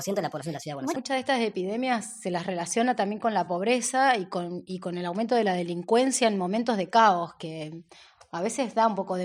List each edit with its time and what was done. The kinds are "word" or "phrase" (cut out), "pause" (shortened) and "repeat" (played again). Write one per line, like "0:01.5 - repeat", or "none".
none